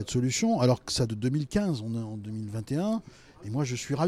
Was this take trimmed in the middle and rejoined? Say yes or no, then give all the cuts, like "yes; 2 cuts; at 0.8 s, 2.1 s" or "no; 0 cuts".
yes; 1 cut; at 1.1 s